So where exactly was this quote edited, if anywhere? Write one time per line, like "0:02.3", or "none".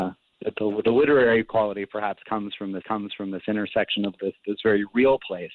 0:02.8
0:04.1